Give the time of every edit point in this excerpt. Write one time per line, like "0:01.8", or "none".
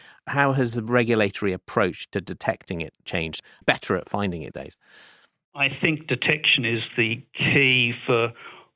0:03.6
0:04.5